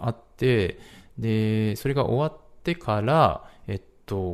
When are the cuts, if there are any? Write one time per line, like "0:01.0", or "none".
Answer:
none